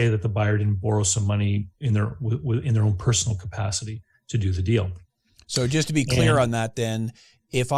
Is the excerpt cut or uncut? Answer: uncut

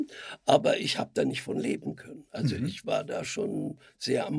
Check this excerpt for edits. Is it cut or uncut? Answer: uncut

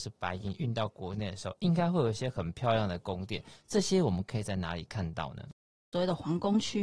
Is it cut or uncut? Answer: uncut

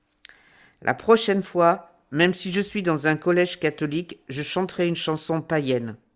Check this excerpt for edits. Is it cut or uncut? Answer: uncut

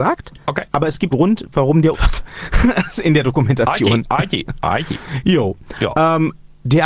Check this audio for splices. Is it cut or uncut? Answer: cut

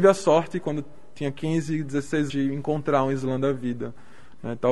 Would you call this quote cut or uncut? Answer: cut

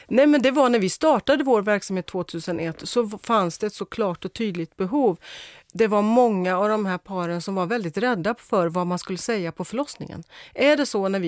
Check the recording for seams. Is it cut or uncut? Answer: uncut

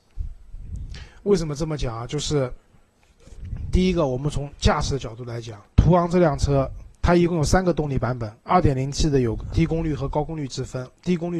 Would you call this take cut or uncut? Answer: cut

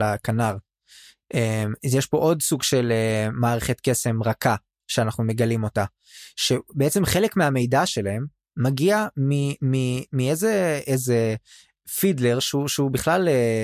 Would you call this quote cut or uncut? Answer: uncut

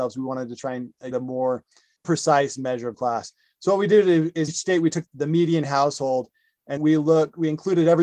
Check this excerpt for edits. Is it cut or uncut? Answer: cut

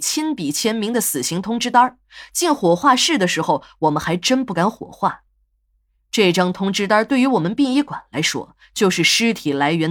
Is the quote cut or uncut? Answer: uncut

